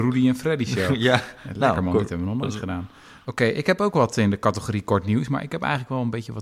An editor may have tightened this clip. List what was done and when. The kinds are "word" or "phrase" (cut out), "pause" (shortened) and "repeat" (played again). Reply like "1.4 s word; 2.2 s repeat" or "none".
none

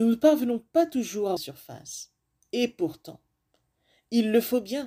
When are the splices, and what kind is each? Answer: 1.4 s word

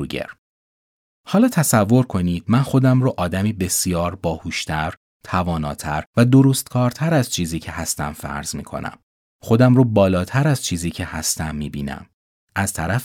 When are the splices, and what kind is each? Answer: none

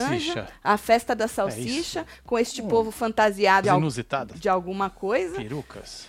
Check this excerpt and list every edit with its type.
3.6 s word

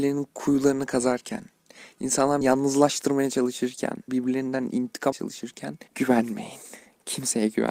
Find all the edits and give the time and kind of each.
2.4 s word; 4.1 s word; 5.1 s word; 5.9 s pause

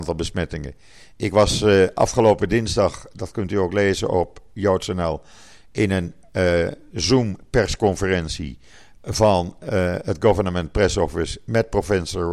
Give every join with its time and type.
none

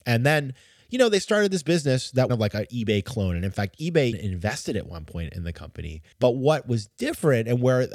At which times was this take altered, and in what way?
2.3 s phrase; 4.1 s word; 6.1 s pause

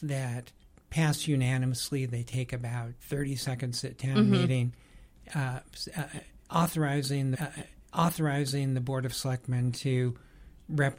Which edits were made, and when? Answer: 3.0 s pause; 7.3 s repeat

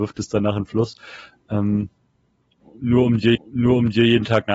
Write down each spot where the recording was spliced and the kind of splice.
3.3 s repeat

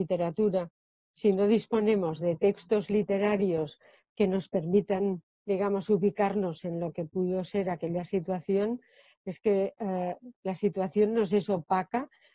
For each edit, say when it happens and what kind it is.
none

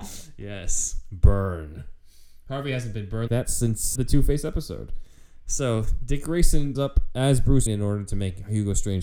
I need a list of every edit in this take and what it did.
3.3 s word; 4.0 s word; 6.8 s word; 7.7 s word

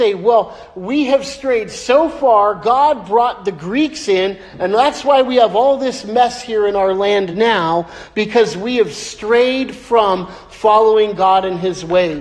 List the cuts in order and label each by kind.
none

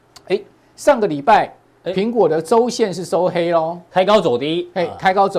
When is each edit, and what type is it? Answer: none

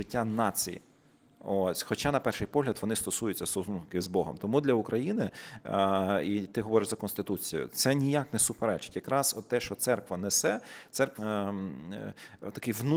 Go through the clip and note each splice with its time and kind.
11.2 s word

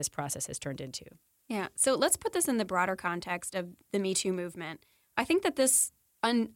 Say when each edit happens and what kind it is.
none

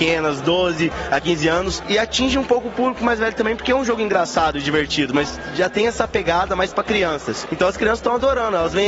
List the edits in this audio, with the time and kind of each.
none

